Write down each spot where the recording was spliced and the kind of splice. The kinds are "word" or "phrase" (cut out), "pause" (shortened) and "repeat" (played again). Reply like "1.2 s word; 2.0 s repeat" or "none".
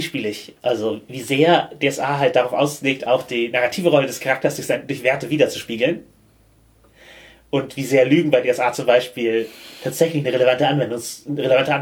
none